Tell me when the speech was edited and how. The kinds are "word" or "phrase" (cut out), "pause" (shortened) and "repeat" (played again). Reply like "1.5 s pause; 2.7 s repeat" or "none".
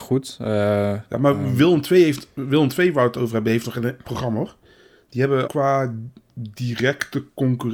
4.0 s word; 5.5 s word